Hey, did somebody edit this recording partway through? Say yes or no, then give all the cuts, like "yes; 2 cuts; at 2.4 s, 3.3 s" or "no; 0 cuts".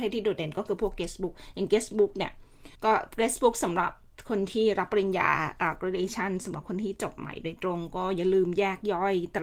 yes; 1 cut; at 2.7 s